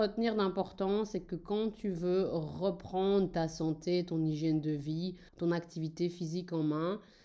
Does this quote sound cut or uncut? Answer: cut